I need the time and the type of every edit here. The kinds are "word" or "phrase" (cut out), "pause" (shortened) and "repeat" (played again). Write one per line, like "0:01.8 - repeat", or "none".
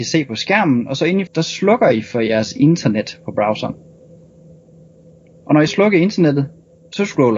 0:01.3 - word
0:05.7 - word